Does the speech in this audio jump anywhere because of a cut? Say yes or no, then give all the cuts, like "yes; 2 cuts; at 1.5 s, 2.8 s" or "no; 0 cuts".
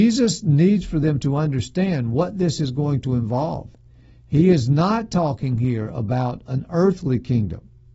no; 0 cuts